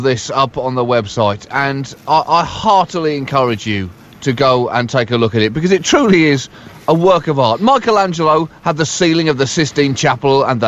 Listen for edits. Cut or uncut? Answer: uncut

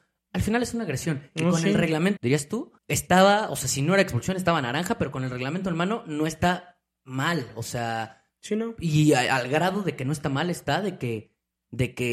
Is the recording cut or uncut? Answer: cut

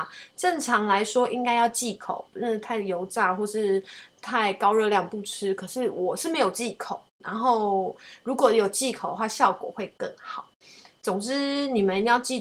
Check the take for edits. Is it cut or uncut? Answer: cut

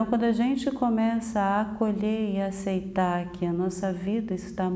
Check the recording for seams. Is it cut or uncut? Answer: uncut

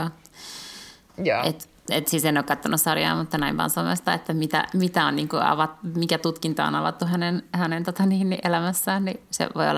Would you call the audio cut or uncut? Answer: uncut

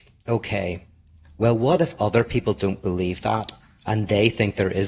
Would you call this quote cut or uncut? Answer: uncut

